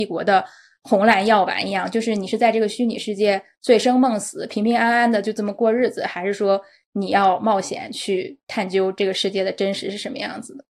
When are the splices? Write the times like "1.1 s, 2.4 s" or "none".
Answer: none